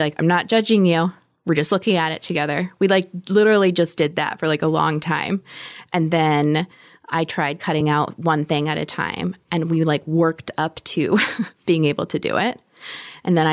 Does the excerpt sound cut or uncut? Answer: uncut